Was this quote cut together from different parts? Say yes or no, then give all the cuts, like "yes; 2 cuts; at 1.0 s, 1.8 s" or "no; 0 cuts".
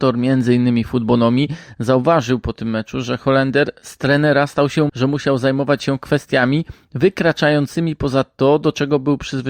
yes; 1 cut; at 4.9 s